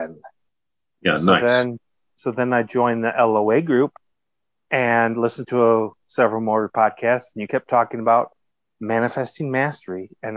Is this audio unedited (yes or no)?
yes